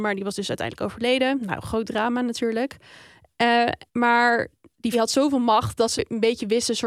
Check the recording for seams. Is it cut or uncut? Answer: cut